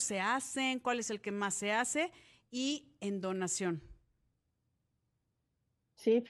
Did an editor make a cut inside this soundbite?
no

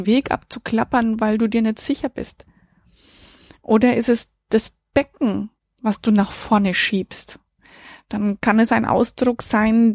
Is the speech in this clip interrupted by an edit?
no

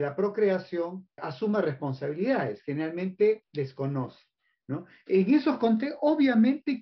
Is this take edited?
yes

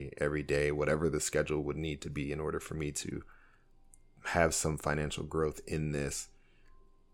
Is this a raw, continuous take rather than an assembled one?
yes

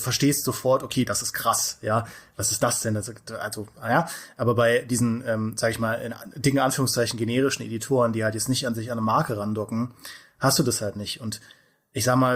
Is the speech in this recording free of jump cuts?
yes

